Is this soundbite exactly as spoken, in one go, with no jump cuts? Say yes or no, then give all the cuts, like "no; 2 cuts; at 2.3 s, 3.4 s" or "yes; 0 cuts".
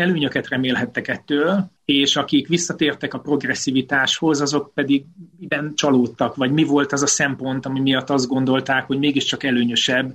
no; 2 cuts; at 1.8 s, 5.3 s